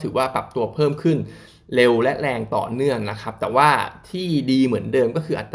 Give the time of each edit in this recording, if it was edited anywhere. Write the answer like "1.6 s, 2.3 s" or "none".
none